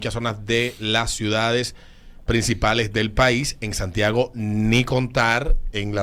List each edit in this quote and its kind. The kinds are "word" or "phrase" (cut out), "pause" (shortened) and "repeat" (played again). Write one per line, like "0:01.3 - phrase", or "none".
none